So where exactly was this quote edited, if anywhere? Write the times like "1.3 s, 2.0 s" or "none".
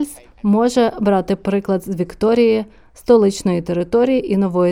none